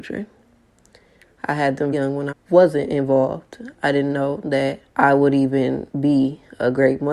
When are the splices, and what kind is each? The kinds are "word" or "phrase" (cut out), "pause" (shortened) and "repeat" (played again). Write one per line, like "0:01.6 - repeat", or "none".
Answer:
0:01.9 - word
0:02.3 - word
0:04.9 - pause
0:05.9 - pause